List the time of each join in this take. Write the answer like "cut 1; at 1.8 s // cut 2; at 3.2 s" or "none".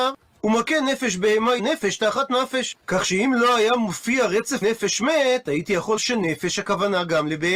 cut 1; at 1.6 s // cut 2; at 2.8 s // cut 3; at 4.6 s // cut 4; at 6.0 s